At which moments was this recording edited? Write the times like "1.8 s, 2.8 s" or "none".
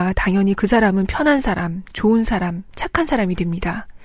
none